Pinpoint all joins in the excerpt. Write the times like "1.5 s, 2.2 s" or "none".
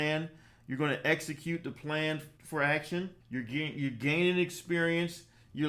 2.4 s, 3.2 s